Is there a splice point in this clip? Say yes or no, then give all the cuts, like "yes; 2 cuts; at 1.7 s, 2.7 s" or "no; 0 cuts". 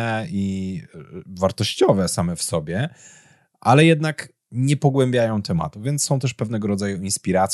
no; 0 cuts